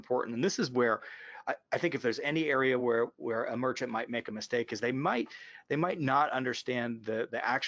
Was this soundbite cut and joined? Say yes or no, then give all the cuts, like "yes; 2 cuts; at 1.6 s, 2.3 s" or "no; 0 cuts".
no; 0 cuts